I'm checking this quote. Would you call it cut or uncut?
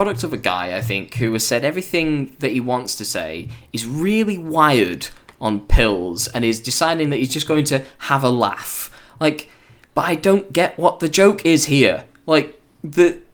uncut